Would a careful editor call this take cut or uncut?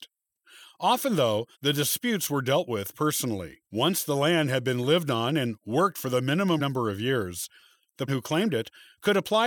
cut